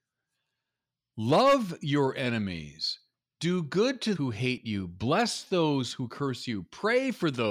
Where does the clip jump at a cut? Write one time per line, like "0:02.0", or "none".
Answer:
0:04.2